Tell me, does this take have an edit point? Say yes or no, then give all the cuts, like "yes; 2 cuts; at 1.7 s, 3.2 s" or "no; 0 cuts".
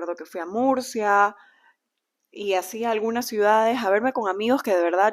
no; 0 cuts